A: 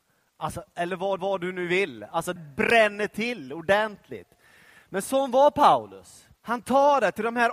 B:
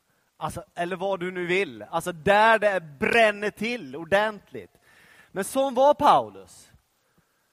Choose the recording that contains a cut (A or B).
A